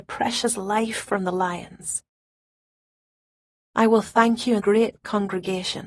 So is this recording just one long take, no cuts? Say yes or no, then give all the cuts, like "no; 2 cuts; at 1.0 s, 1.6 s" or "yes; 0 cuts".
no; 1 cut; at 4.6 s